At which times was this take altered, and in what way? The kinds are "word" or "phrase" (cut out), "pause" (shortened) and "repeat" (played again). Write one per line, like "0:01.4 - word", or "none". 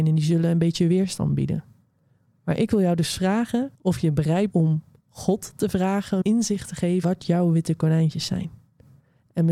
0:03.7 - pause
0:04.5 - word
0:06.2 - word
0:07.0 - word